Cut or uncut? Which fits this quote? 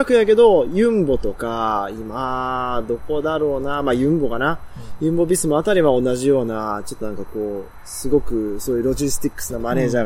uncut